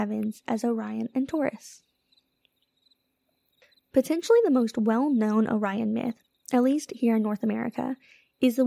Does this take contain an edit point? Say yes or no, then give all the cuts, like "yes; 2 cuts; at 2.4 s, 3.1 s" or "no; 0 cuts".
no; 0 cuts